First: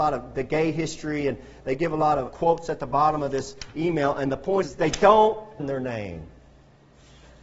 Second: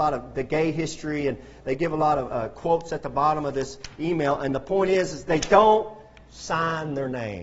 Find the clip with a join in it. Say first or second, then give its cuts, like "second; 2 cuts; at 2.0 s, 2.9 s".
first; 3 cuts; at 2.3 s, 4.6 s, 5.6 s